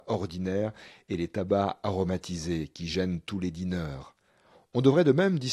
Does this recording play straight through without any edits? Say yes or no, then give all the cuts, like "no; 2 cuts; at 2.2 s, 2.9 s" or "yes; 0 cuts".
yes; 0 cuts